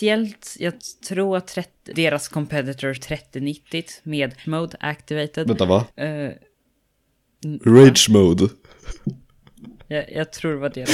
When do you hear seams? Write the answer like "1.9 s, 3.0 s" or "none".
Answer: 1.9 s, 3.0 s, 4.4 s, 5.9 s